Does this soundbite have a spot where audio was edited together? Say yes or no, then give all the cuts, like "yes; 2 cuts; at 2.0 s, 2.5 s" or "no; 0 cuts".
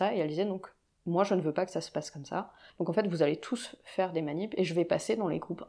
no; 0 cuts